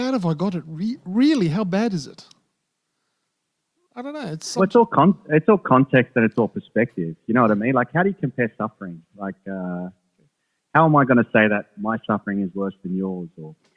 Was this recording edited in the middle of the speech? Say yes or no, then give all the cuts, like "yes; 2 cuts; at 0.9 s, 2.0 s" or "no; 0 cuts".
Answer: no; 0 cuts